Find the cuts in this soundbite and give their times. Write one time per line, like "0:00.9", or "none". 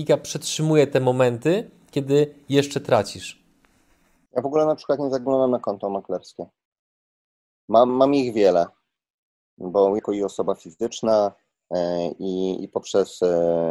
0:07.9
0:10.0